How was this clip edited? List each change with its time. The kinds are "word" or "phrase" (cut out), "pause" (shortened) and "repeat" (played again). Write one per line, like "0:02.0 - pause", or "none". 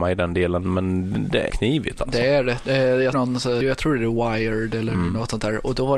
0:01.5 - word
0:03.1 - word
0:03.6 - word